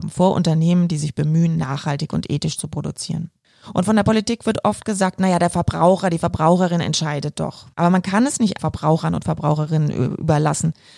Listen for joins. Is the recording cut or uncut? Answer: cut